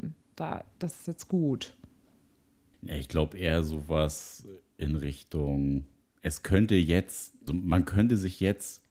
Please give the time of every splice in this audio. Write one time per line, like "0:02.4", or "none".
0:06.0
0:07.5